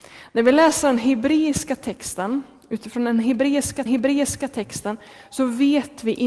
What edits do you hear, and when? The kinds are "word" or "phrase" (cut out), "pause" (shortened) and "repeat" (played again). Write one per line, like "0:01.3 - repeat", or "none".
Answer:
0:03.9 - repeat